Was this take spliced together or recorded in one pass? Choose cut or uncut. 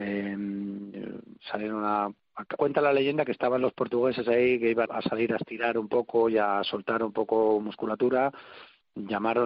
cut